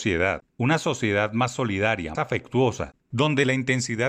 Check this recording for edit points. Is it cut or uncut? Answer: cut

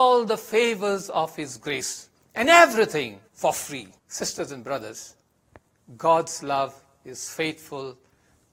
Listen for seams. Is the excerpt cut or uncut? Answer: cut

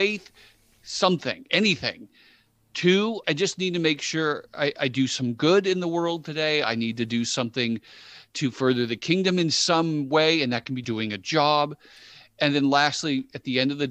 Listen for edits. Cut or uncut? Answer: cut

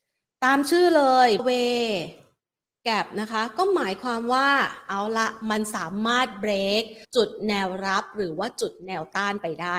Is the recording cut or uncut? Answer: cut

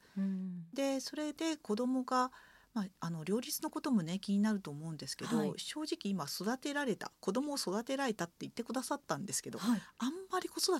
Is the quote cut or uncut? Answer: uncut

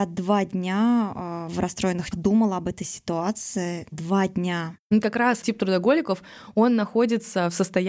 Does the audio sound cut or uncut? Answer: cut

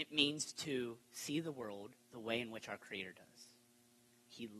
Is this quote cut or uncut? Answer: cut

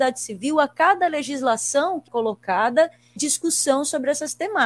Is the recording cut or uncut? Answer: cut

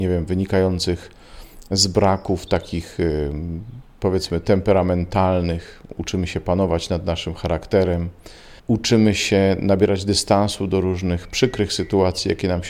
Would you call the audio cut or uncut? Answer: cut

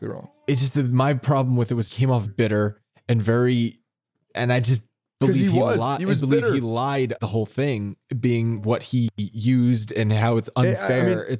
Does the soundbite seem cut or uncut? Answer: cut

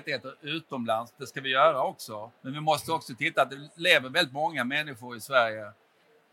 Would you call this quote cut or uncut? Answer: cut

